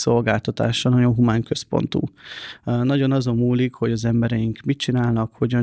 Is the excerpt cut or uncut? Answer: uncut